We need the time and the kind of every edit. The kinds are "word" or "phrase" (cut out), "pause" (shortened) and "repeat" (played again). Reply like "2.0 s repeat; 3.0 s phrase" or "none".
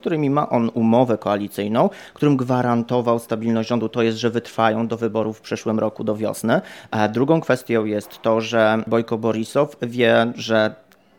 none